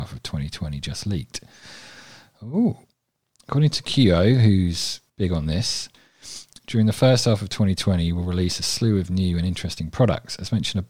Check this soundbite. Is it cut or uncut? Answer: cut